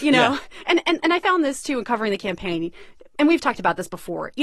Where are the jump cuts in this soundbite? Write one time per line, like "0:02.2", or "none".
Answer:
none